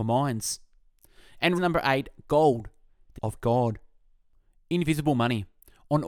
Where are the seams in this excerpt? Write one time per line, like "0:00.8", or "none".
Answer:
0:01.5
0:03.1